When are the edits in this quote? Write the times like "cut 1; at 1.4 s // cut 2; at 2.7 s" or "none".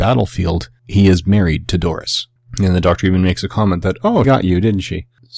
cut 1; at 4.2 s